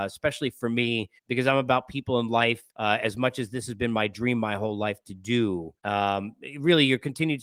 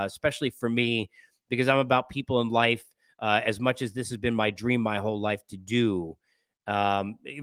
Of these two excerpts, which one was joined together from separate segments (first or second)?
first